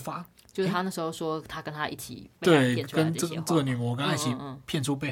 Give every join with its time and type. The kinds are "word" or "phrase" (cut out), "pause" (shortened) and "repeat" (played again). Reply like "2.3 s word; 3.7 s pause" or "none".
2.4 s word